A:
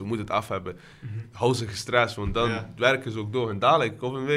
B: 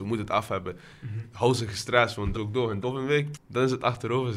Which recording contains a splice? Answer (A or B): B